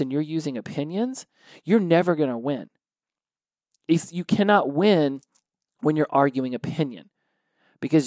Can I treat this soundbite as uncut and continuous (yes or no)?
yes